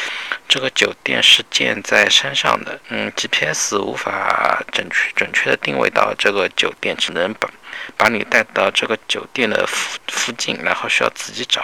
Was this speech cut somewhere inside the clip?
yes; 1 cut; at 2.8 s

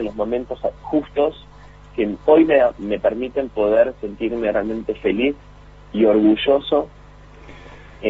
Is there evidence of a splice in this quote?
no; 0 cuts

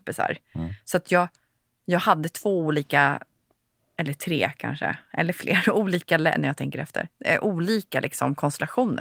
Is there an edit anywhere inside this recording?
no; 0 cuts

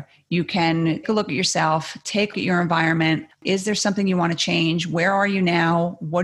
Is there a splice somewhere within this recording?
yes; 2 cuts; at 1.0 s, 2.3 s

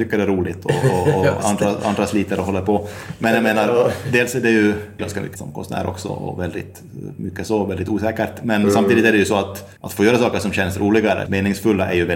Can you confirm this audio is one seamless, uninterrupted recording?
no; 5 cuts; at 1.4 s, 5.0 s, 5.4 s, 9.8 s, 11.3 s

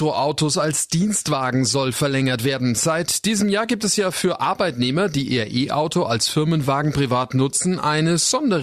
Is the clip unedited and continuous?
yes; 0 cuts

